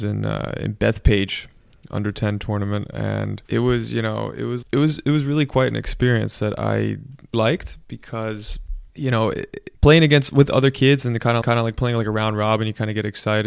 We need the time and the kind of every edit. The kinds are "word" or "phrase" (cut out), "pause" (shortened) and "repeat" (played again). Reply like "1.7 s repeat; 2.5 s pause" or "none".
3.4 s pause; 4.6 s word; 7.3 s word; 8.9 s pause; 9.7 s pause; 11.4 s repeat